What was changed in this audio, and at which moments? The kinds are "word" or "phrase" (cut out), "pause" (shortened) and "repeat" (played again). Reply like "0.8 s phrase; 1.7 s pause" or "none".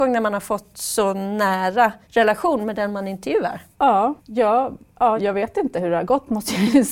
2.0 s pause; 4.2 s pause; 5.2 s word